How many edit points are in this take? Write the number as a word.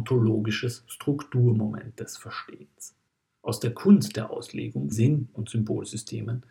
two